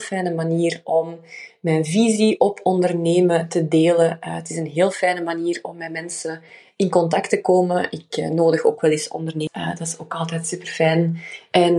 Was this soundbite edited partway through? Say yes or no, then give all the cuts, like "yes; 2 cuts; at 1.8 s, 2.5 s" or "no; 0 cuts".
no; 0 cuts